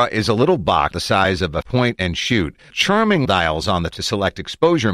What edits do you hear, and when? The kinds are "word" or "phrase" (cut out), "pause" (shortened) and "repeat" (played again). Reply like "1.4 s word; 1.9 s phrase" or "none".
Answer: 0.9 s word; 1.6 s word; 2.7 s word; 3.3 s word; 3.9 s word